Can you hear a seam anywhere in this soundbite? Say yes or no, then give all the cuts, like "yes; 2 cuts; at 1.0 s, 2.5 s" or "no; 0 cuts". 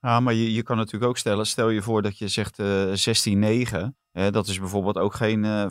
yes; 1 cut; at 4.0 s